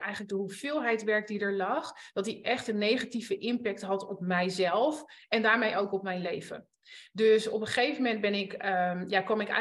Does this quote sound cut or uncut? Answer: uncut